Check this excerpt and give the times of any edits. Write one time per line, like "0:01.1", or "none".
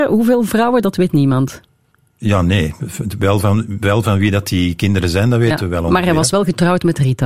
0:01.9